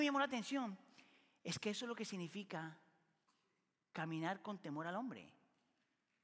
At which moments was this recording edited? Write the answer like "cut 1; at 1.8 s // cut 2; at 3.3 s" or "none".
none